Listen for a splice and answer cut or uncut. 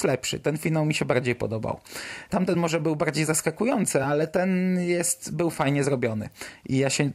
uncut